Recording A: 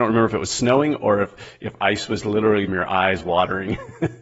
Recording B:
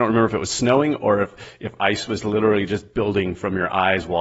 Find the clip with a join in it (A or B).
A